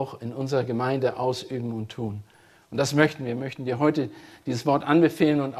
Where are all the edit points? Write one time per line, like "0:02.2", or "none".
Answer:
none